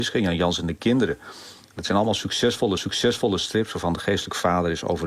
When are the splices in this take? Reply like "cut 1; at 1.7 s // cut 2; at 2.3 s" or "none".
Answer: cut 1; at 2.8 s